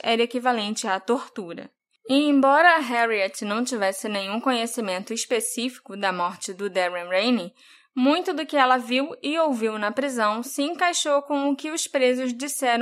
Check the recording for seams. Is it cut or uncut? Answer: uncut